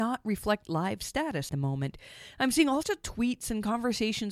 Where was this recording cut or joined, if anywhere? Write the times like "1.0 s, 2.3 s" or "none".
1.5 s, 2.8 s